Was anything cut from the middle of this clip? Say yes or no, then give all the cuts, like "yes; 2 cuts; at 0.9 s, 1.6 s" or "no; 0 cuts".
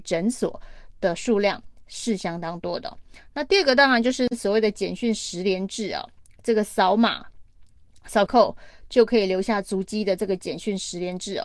yes; 1 cut; at 8.3 s